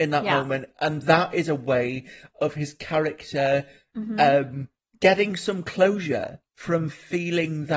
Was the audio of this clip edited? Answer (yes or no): no